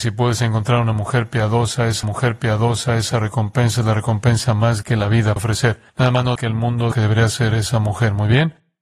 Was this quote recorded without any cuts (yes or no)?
no